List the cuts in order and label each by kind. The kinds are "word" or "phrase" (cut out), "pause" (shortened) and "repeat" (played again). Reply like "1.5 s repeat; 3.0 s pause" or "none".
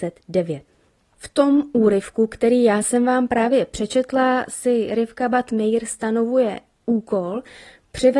none